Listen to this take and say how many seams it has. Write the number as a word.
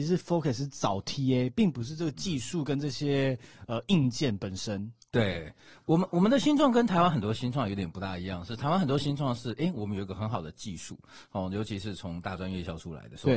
zero